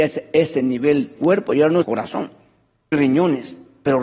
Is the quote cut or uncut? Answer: cut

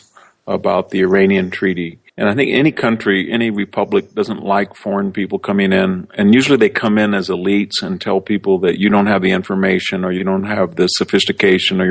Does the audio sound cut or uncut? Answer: cut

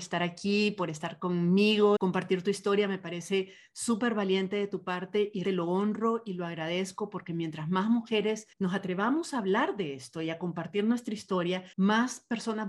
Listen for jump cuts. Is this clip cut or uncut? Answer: cut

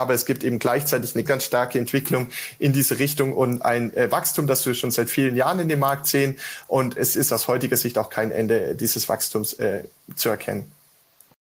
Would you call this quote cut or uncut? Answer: cut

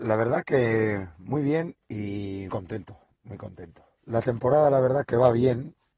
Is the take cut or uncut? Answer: cut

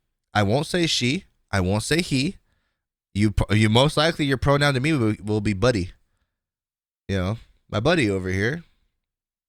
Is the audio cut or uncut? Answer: uncut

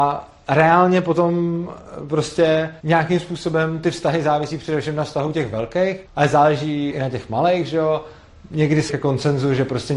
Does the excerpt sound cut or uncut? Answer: cut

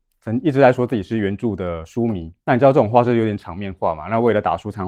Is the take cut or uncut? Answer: cut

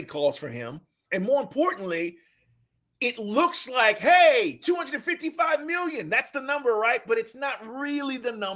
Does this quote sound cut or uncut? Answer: uncut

